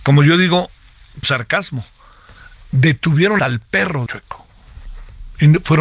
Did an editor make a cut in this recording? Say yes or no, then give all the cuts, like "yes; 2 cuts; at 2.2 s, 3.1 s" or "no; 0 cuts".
yes; 3 cuts; at 1.2 s, 3.4 s, 4.1 s